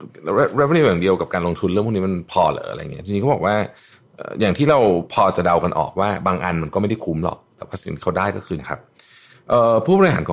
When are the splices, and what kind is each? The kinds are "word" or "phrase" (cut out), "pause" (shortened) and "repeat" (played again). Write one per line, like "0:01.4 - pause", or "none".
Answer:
0:08.6 - word